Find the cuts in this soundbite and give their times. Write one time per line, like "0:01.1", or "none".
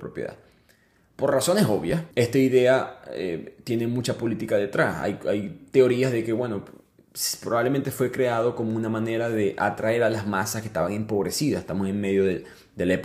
0:02.1